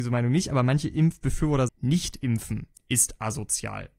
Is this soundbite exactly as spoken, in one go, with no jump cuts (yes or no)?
no